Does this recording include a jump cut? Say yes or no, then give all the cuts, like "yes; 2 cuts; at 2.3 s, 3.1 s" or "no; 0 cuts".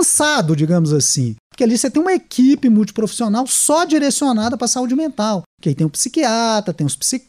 no; 0 cuts